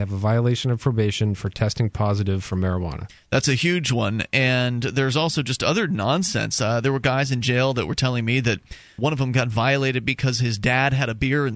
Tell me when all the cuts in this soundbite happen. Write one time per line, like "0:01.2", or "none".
0:09.0

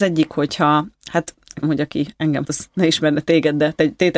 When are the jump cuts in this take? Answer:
0:01.6
0:02.4

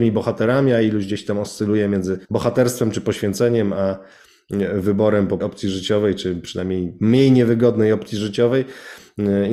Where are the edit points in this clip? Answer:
0:02.2
0:05.4

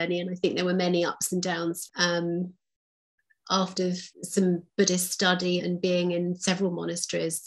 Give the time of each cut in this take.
0:01.9
0:03.8
0:04.1
0:05.6

